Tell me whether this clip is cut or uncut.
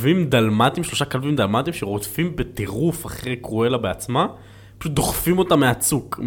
uncut